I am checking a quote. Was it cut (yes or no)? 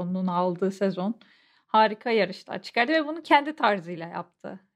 no